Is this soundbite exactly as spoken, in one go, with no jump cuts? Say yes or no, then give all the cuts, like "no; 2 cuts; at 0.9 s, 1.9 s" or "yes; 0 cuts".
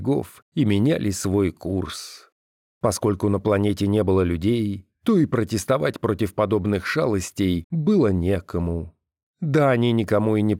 yes; 0 cuts